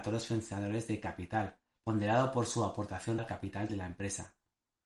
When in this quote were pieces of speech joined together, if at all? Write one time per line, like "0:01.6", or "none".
0:01.8
0:03.2
0:03.7

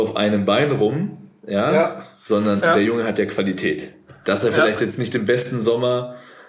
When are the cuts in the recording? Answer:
none

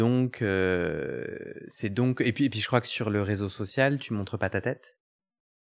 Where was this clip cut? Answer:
none

